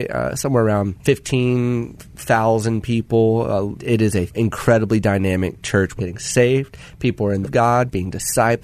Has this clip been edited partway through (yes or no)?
yes